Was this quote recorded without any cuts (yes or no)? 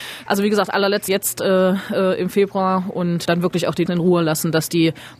no